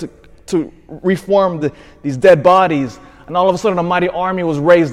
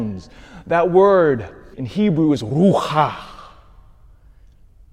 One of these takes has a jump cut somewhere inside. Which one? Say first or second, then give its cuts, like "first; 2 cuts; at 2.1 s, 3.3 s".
second; 1 cut; at 1.7 s